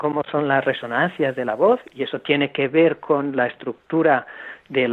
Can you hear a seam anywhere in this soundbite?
no; 0 cuts

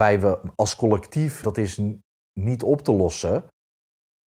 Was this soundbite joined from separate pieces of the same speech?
yes; 1 cut; at 1.4 s

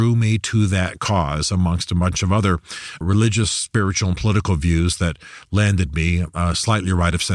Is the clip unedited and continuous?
no; 1 cut; at 3.0 s

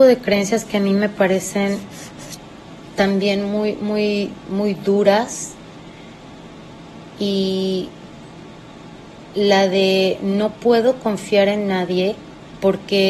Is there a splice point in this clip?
no; 0 cuts

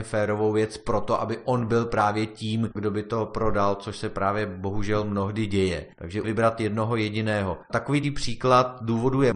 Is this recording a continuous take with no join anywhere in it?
no; 2 cuts; at 6.2 s, 8.0 s

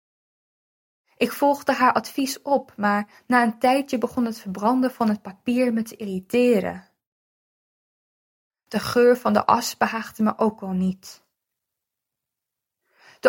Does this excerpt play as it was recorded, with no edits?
yes; 0 cuts

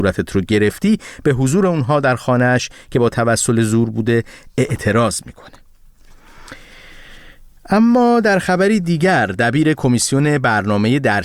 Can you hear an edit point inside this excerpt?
no; 0 cuts

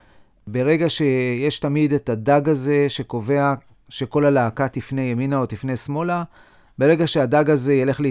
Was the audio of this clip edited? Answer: no; 0 cuts

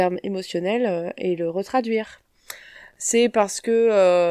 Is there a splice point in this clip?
no; 0 cuts

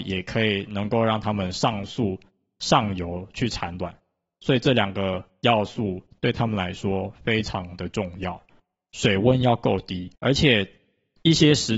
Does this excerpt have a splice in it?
yes; 1 cut; at 10.1 s

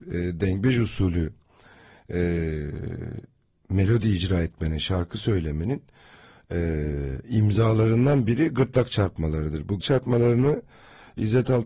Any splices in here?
yes; 1 cut; at 9.8 s

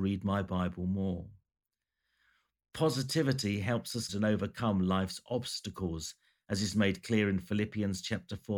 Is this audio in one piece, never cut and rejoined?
no; 1 cut; at 4.1 s

